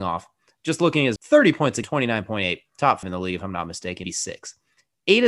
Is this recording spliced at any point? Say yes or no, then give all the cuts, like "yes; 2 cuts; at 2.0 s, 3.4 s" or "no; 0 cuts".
yes; 4 cuts; at 1.2 s, 1.8 s, 3.0 s, 4.0 s